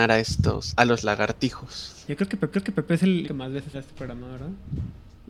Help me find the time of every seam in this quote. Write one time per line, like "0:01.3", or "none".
0:02.5
0:03.3
0:03.7